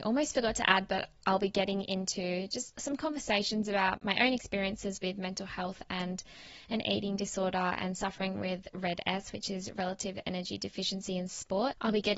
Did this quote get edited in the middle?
no; 0 cuts

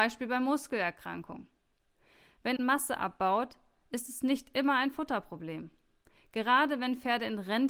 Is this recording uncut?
no; 1 cut; at 2.6 s

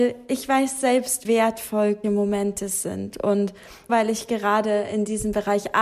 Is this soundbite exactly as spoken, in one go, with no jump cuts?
no; 3 cuts; at 1.2 s, 2.0 s, 3.9 s

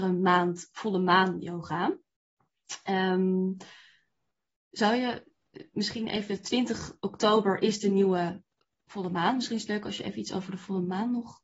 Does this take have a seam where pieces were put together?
no; 0 cuts

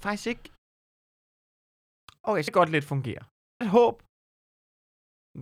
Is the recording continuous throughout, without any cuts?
no; 2 cuts; at 2.5 s, 3.6 s

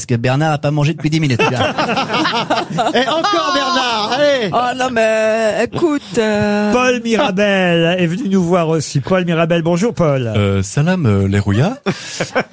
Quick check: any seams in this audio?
no; 0 cuts

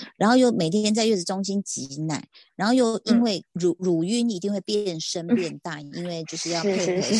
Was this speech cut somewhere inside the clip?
yes; 1 cut; at 3.8 s

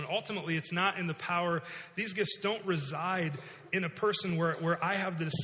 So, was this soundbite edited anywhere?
no; 0 cuts

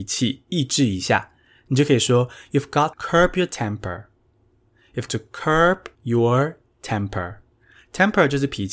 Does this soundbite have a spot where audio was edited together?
yes; 3 cuts; at 2.9 s, 5.1 s, 5.9 s

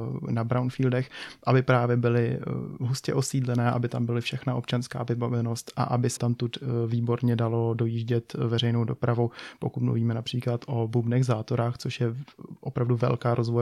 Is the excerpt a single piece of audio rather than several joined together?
no; 1 cut; at 6.2 s

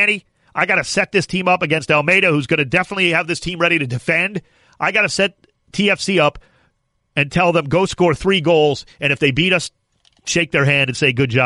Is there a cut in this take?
no; 0 cuts

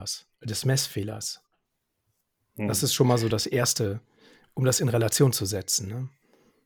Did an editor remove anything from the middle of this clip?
no; 0 cuts

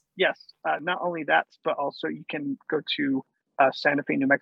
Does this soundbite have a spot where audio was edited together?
no; 0 cuts

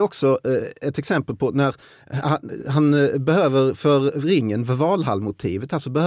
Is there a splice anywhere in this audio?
no; 0 cuts

